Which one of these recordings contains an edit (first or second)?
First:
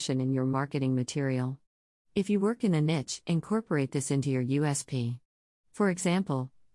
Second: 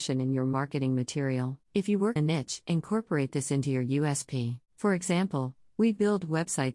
second